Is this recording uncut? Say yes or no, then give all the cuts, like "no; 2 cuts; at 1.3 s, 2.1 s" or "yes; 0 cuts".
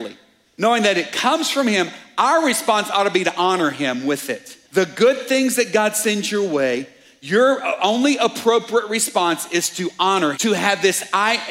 no; 2 cuts; at 4.6 s, 10.3 s